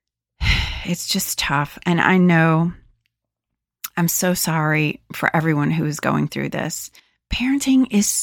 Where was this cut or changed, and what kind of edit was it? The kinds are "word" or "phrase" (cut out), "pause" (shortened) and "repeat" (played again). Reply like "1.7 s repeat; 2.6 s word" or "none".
none